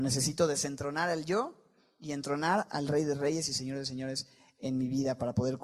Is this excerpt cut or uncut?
uncut